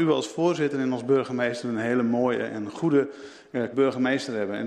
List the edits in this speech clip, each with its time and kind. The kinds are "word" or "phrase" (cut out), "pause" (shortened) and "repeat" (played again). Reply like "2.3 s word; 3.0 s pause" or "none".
3.7 s word